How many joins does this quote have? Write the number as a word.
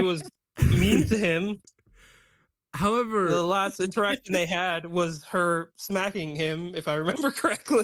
zero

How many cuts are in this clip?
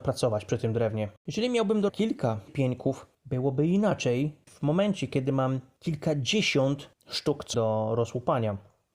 six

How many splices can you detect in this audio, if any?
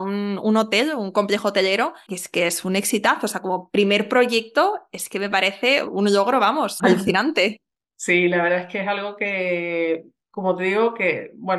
three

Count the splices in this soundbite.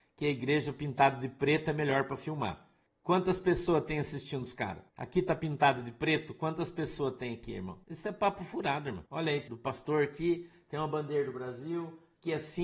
five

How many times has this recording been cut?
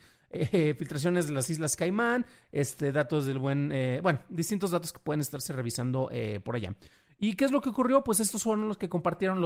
zero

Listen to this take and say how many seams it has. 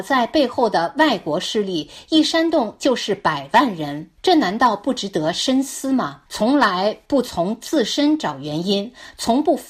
two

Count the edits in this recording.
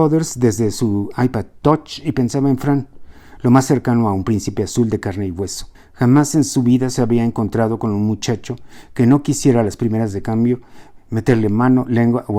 one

